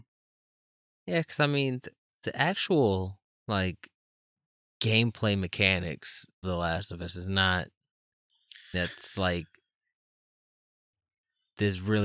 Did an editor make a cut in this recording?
yes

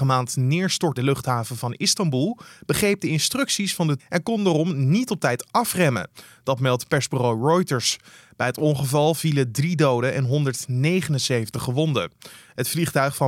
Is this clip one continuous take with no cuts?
no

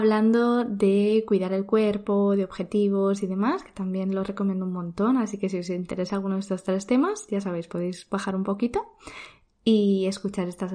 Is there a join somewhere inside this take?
no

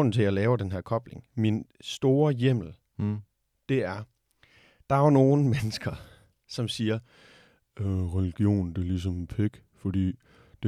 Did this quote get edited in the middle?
no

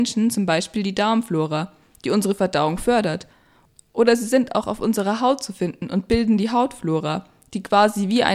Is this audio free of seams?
yes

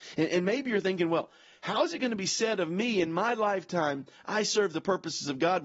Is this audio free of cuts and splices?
yes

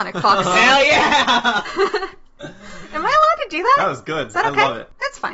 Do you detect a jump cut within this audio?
no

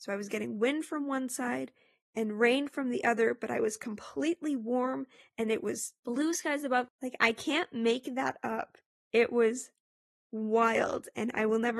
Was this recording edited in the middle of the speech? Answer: no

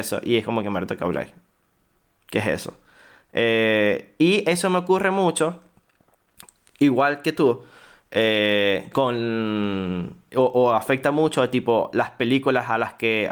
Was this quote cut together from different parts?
no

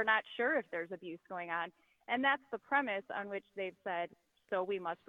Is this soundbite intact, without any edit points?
yes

